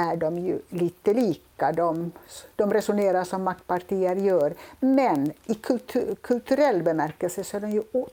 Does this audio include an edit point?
no; 0 cuts

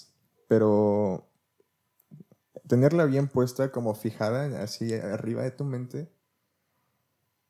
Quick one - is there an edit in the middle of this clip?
no; 0 cuts

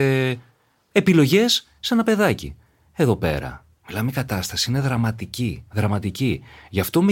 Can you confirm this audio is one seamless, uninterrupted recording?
no; 1 cut; at 5.7 s

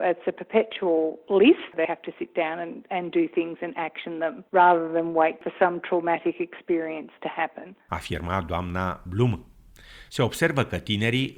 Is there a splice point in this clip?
yes; 1 cut; at 1.8 s

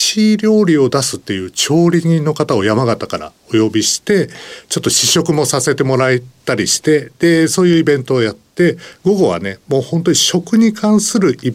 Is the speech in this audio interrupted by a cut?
no; 0 cuts

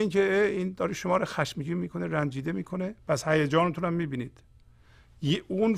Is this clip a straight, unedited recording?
yes; 0 cuts

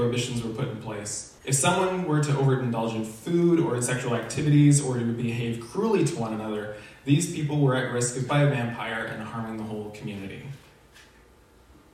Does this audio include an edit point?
yes; 2 cuts; at 1.4 s, 8.3 s

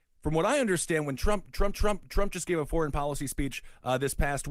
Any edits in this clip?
yes; 1 cut; at 1.7 s

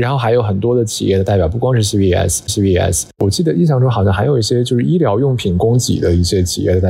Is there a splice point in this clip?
yes; 1 cut; at 2.5 s

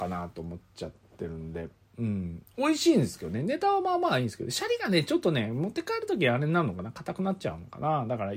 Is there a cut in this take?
no; 0 cuts

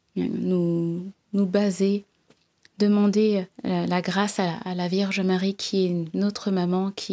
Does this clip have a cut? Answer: yes; 1 cut; at 3.5 s

